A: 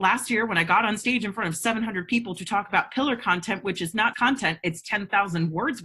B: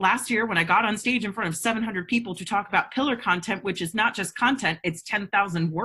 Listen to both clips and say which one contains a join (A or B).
A